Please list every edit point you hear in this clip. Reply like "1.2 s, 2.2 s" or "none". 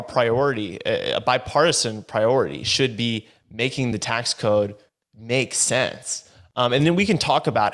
none